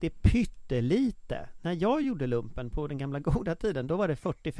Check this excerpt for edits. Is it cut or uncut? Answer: uncut